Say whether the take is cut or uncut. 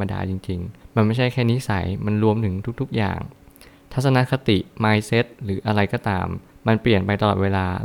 uncut